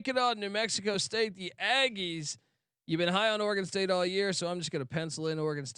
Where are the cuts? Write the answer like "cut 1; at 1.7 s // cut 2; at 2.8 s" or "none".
none